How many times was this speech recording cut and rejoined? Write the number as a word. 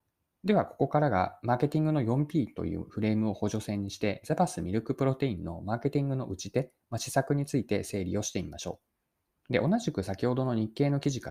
one